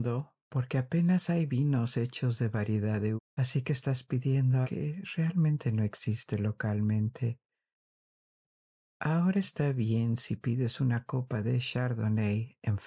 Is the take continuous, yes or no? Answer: no